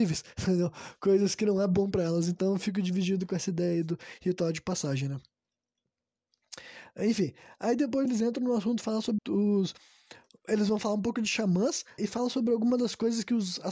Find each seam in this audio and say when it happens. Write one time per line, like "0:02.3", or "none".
0:08.1
0:09.2
0:12.0